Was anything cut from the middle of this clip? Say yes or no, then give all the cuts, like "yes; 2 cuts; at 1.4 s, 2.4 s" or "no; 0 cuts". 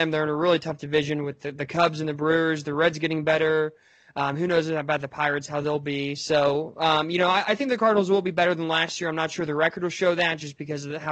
no; 0 cuts